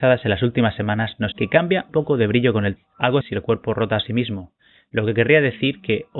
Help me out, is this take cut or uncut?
cut